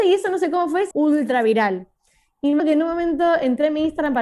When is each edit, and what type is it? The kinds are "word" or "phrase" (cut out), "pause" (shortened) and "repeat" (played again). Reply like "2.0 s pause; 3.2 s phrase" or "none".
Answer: 0.9 s word; 2.6 s word